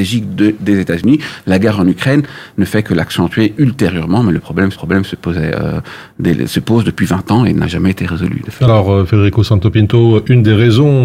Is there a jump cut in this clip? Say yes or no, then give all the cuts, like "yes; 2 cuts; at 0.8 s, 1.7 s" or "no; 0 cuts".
yes; 1 cut; at 4.7 s